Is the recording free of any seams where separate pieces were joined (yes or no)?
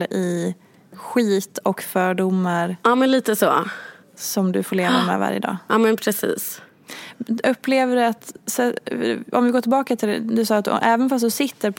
yes